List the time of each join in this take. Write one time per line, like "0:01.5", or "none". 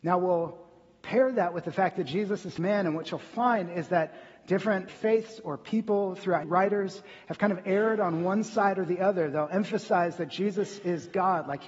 0:02.6
0:04.9
0:06.4